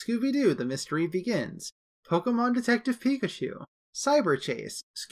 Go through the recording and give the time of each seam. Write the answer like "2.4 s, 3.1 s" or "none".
none